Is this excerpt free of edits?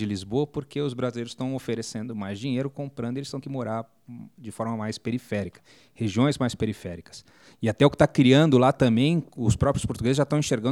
no; 1 cut; at 3.4 s

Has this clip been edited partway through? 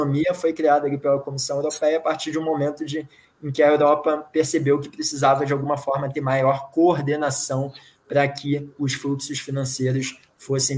no; 0 cuts

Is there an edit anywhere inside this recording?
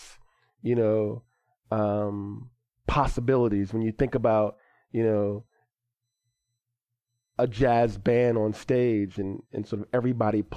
no; 0 cuts

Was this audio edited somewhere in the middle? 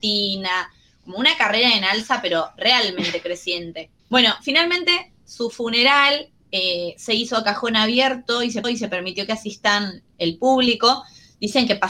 yes; 3 cuts; at 4.0 s, 6.4 s, 8.6 s

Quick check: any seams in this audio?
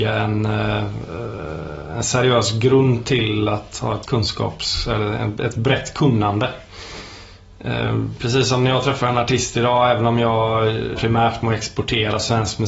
yes; 2 cuts; at 4.0 s, 10.9 s

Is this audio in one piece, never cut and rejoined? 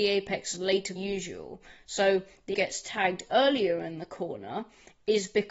no; 2 cuts; at 1.0 s, 2.5 s

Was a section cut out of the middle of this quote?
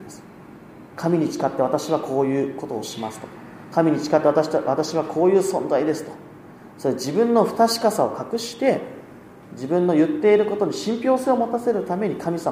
no; 0 cuts

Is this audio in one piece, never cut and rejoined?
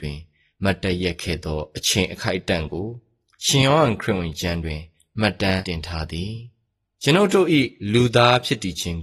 yes; 0 cuts

